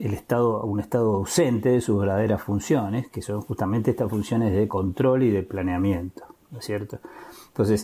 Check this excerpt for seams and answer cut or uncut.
uncut